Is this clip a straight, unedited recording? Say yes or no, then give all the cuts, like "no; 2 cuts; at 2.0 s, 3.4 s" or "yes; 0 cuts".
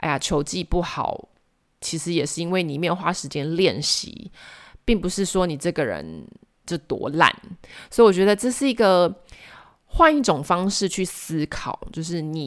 yes; 0 cuts